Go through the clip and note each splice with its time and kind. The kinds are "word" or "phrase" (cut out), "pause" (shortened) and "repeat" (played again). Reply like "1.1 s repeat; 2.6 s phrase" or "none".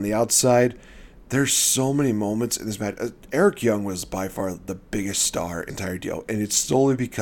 5.7 s word